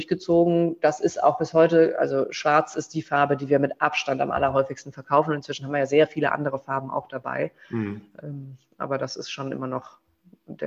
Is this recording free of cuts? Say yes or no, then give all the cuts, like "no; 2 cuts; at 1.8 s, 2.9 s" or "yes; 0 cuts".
yes; 0 cuts